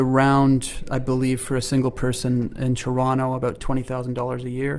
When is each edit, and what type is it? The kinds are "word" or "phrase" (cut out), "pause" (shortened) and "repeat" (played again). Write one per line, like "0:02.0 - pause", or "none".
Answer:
none